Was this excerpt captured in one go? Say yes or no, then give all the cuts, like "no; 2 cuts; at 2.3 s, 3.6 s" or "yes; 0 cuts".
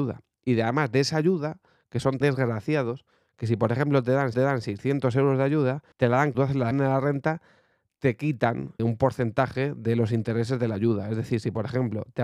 no; 6 cuts; at 2.2 s, 4.3 s, 5.9 s, 6.3 s, 6.7 s, 8.8 s